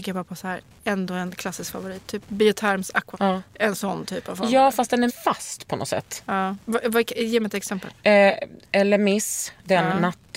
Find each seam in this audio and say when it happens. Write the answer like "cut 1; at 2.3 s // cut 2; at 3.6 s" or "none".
cut 1; at 3.1 s // cut 2; at 5.1 s // cut 3; at 6.6 s // cut 4; at 8.6 s